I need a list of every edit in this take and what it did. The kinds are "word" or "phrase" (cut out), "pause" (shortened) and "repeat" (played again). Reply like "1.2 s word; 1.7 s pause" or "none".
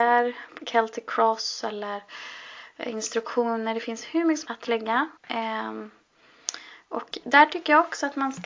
4.5 s word; 5.2 s pause